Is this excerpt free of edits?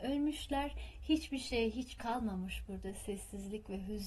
no; 1 cut; at 2.0 s

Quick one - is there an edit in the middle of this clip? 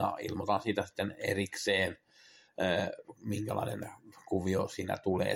no; 0 cuts

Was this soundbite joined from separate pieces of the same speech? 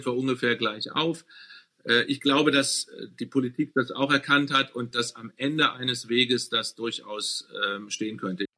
no; 0 cuts

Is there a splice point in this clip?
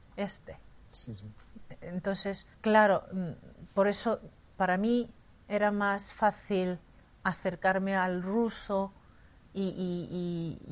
yes; 1 cut; at 2.5 s

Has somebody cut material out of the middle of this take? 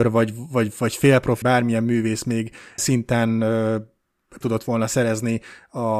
yes; 3 cuts; at 1.4 s, 2.8 s, 4.4 s

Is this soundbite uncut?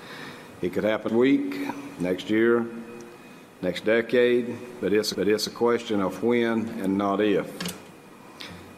no; 2 cuts; at 1.1 s, 5.1 s

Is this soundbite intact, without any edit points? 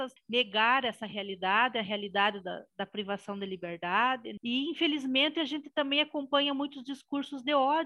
yes; 0 cuts

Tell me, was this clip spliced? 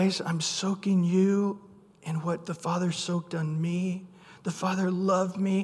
no; 0 cuts

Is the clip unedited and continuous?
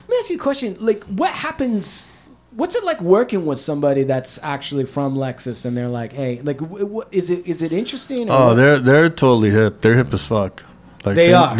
yes; 0 cuts

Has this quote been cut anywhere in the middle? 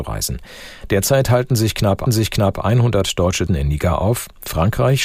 yes; 2 cuts; at 2.1 s, 3.5 s

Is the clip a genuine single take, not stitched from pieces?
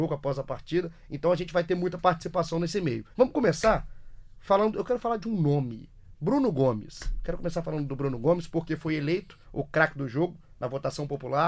no; 2 cuts; at 3.1 s, 9.4 s

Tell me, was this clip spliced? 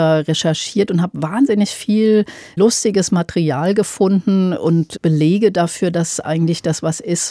no; 0 cuts

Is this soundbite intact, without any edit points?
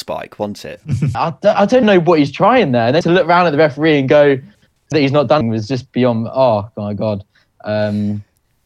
no; 5 cuts; at 1.1 s, 1.8 s, 3.0 s, 4.9 s, 5.4 s

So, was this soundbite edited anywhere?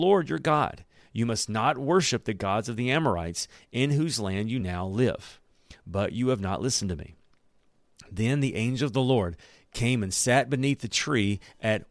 no; 0 cuts

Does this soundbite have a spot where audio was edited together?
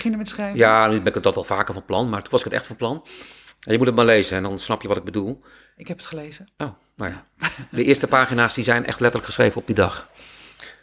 no; 0 cuts

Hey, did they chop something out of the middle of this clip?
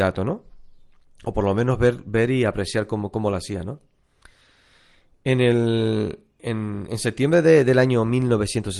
no; 0 cuts

